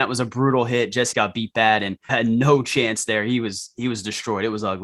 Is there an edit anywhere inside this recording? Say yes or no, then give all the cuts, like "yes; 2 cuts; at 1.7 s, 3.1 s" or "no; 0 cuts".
yes; 2 cuts; at 1.1 s, 2.1 s